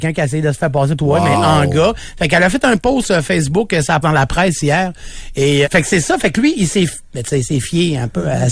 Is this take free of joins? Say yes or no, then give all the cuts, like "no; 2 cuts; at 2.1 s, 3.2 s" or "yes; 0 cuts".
no; 3 cuts; at 1.0 s, 4.0 s, 5.6 s